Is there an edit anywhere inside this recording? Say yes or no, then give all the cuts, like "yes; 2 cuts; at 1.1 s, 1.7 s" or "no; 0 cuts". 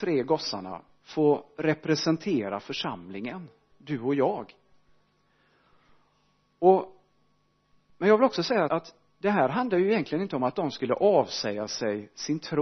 yes; 1 cut; at 8.7 s